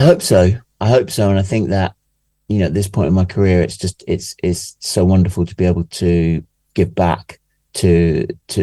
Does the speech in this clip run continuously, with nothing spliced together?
yes; 0 cuts

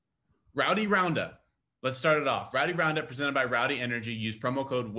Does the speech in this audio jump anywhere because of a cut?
no; 0 cuts

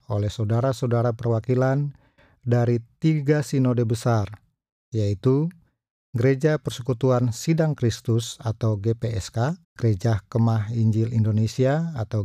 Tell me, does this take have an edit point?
yes; 1 cut; at 9.6 s

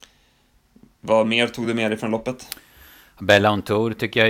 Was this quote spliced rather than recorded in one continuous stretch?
no; 0 cuts

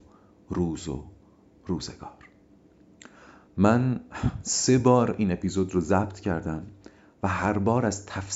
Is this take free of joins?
yes; 0 cuts

